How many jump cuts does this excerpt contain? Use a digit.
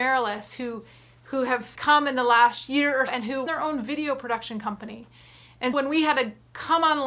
4